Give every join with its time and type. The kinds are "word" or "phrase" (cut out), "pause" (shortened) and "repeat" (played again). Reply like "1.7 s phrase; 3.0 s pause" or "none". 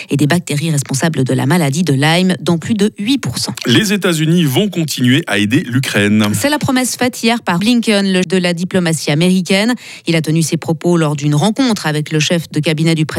7.6 s word; 8.2 s word